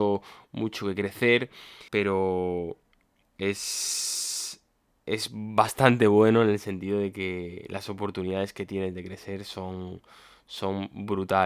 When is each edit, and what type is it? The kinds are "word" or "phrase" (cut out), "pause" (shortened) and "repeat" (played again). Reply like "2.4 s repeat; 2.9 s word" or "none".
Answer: 1.9 s pause